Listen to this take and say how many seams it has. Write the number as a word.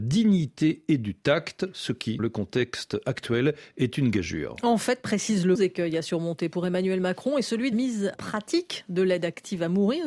four